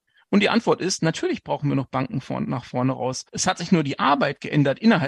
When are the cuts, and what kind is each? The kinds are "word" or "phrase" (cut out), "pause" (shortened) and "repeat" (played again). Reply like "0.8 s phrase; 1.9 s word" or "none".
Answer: 3.3 s pause